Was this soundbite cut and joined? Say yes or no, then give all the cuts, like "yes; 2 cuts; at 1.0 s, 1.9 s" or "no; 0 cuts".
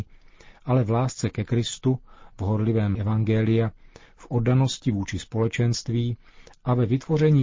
yes; 1 cut; at 2.9 s